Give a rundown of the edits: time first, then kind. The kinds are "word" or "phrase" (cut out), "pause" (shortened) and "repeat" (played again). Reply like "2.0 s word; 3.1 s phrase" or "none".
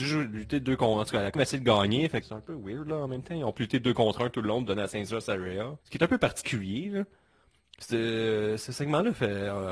1.3 s word; 2.2 s word; 3.6 s word; 5.8 s pause